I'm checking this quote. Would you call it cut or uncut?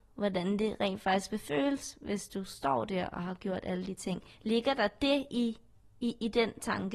uncut